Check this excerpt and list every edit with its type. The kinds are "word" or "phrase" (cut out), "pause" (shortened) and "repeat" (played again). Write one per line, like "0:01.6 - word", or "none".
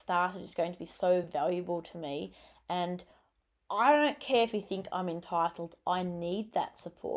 none